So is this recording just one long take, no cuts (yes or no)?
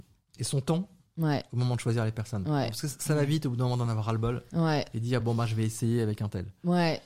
yes